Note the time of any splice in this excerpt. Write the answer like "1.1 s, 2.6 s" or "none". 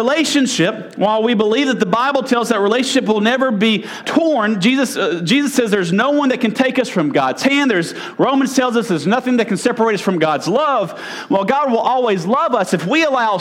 4.0 s